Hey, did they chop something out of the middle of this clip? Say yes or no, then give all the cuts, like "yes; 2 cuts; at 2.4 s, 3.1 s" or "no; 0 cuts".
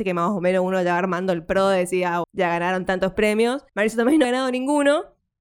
yes; 3 cuts; at 2.2 s, 3.7 s, 4.2 s